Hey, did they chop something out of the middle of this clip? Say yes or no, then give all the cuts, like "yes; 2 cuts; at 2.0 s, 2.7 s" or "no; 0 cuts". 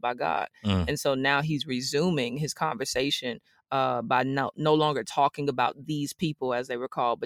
no; 0 cuts